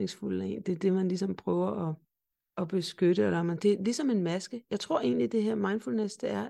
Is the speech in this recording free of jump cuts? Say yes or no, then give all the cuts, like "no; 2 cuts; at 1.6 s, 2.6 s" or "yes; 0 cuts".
no; 2 cuts; at 2.3 s, 3.6 s